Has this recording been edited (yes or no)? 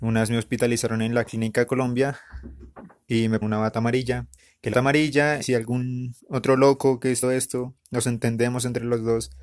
yes